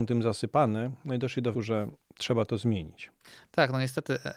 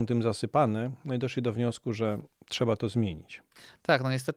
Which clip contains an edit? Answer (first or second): first